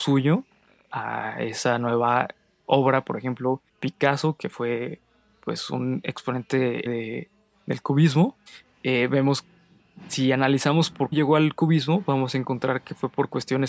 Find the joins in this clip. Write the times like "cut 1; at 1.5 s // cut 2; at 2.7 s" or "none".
cut 1; at 3.7 s // cut 2; at 6.9 s // cut 3; at 8.5 s // cut 4; at 11.1 s

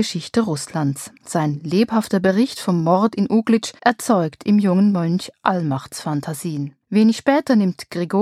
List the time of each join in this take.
cut 1; at 1.2 s // cut 2; at 3.8 s // cut 3; at 6.8 s

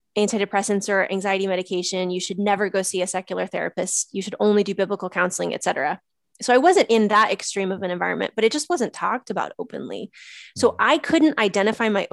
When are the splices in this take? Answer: none

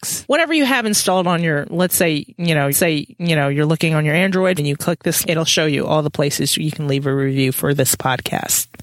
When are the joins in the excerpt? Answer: cut 1; at 2.7 s // cut 2; at 4.6 s // cut 3; at 5.2 s

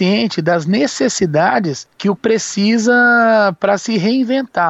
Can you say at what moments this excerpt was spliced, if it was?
cut 1; at 2.2 s

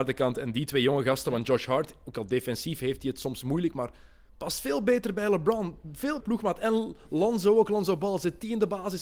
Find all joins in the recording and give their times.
cut 1; at 6.2 s

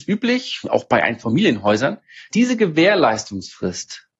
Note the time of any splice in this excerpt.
cut 1; at 2.3 s

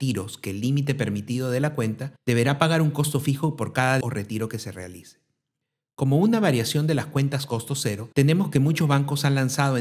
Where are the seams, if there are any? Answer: cut 1; at 2.2 s // cut 2; at 4.0 s // cut 3; at 8.1 s

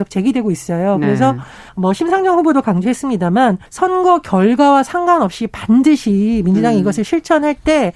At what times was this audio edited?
cut 1; at 1.7 s // cut 2; at 3.7 s

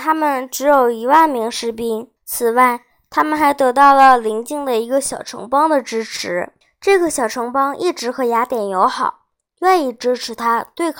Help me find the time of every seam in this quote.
cut 1; at 2.2 s // cut 2; at 6.6 s

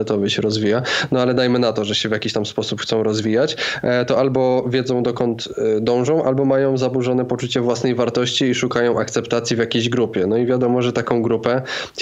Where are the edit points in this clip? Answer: none

